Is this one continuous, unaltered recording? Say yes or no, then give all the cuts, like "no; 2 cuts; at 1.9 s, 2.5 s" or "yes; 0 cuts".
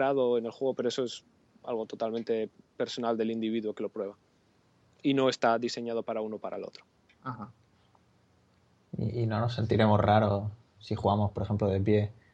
yes; 0 cuts